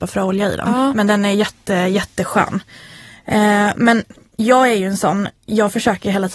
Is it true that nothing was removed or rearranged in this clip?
yes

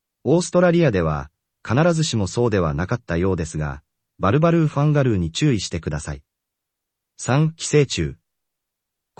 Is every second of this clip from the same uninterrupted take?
yes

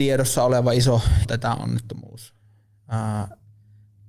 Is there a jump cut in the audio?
yes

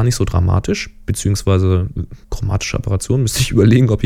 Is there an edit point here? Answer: yes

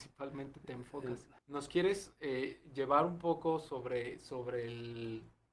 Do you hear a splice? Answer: yes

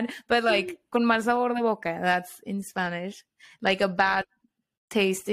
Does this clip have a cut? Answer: no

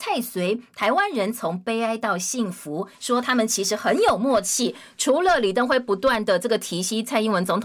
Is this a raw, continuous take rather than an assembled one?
no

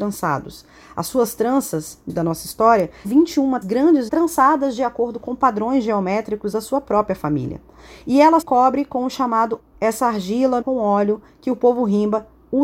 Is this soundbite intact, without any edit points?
no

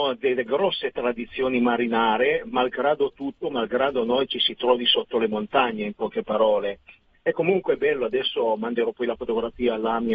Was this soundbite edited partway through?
no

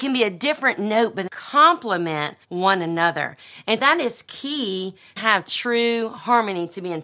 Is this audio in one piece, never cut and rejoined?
no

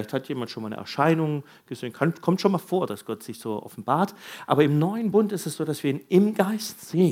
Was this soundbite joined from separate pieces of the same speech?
no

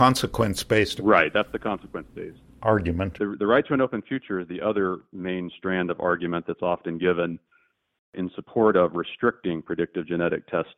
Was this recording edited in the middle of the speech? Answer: no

